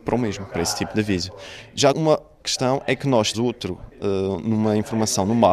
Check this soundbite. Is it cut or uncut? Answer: cut